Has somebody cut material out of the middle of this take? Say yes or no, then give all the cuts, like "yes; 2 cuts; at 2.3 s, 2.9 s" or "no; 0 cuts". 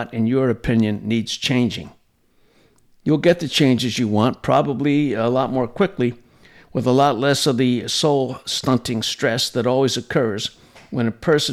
no; 0 cuts